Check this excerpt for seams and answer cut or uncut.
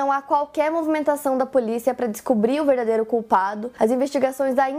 uncut